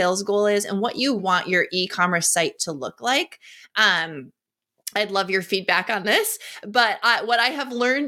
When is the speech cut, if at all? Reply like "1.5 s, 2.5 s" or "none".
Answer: 1.2 s